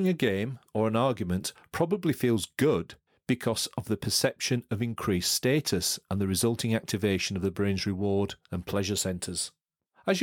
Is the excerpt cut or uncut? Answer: uncut